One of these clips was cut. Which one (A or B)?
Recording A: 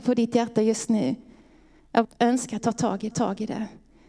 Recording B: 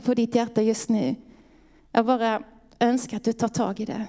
A